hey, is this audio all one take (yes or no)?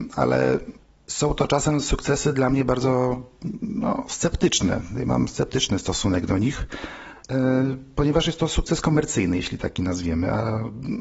no